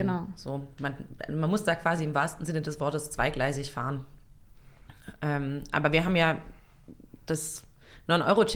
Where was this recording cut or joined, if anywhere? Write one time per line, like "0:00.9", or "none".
none